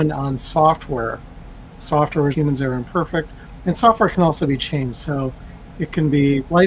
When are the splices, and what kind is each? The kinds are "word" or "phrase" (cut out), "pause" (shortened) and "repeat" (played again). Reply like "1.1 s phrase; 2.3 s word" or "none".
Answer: 2.3 s phrase